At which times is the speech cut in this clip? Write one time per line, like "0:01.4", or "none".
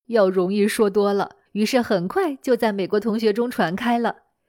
0:01.5